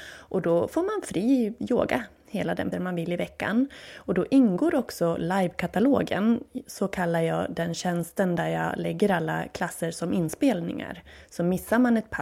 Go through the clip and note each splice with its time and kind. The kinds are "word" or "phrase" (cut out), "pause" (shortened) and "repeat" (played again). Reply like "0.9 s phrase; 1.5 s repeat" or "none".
2.7 s phrase